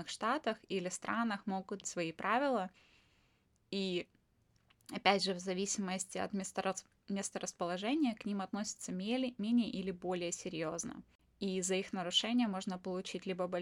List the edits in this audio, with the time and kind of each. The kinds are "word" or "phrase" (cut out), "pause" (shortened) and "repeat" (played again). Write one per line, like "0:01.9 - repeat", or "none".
0:01.8 - word